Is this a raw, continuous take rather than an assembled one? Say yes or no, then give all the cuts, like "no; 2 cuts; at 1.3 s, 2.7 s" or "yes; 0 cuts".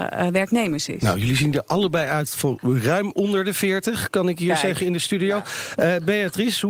yes; 0 cuts